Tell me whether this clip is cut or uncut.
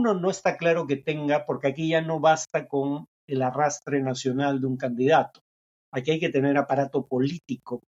uncut